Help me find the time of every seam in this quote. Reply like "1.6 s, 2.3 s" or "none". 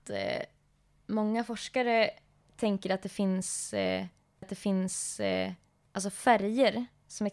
4.4 s

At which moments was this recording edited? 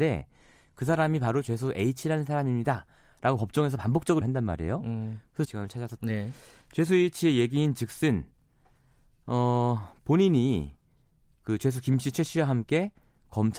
4.2 s, 5.4 s, 6.0 s

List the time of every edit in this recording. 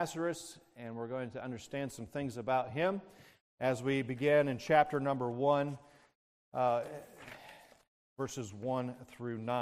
none

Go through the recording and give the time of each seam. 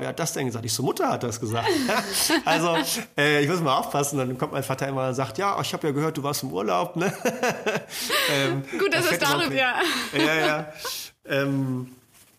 9.5 s

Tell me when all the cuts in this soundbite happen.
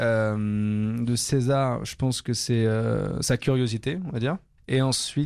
none

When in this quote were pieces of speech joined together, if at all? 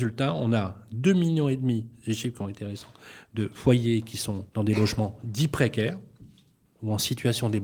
4.5 s

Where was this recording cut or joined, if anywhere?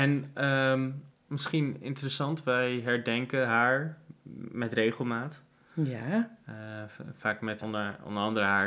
1.1 s, 7.6 s

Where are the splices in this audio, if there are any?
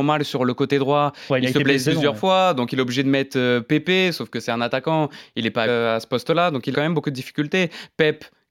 1.8 s, 5.7 s, 6.7 s

